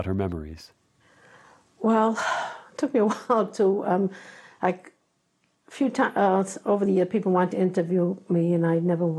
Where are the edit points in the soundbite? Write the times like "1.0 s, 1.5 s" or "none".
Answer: none